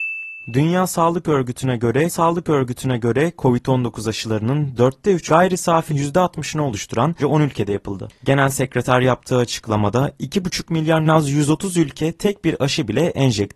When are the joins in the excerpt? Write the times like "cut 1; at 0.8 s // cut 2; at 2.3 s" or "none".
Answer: cut 1; at 2.1 s // cut 2; at 5.3 s // cut 3; at 5.9 s // cut 4; at 7.2 s // cut 5; at 11.1 s